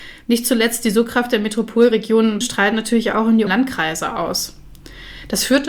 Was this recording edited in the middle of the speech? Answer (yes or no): yes